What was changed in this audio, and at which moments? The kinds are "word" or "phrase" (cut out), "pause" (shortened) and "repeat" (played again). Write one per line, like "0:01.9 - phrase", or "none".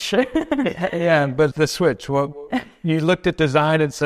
0:01.5 - word